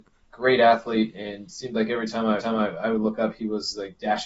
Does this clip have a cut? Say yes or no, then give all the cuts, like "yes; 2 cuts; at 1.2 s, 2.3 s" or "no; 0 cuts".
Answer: yes; 1 cut; at 2.4 s